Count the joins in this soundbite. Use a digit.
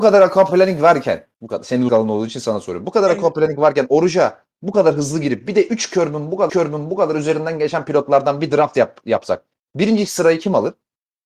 3